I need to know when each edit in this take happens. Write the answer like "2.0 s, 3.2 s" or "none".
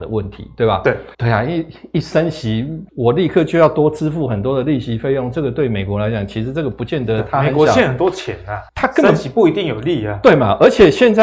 1.1 s, 2.9 s, 8.7 s